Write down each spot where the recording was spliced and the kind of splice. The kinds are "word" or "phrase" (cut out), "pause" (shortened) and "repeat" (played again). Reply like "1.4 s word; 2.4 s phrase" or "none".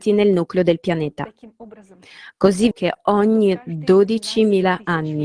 2.7 s word